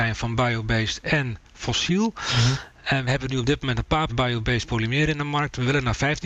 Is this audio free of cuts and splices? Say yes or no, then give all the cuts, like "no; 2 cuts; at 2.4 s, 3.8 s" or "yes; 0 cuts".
no; 2 cuts; at 3.1 s, 4.1 s